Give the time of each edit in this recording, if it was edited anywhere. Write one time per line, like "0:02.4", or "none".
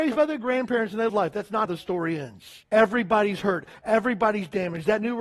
0:01.1
0:01.7
0:02.6